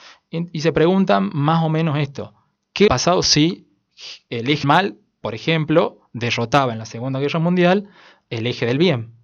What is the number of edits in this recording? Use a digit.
3